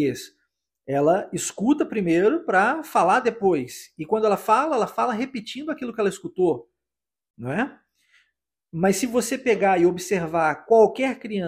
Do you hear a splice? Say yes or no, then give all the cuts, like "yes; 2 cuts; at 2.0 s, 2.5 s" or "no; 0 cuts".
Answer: no; 0 cuts